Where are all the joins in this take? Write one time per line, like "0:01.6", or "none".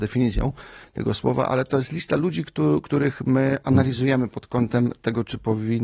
none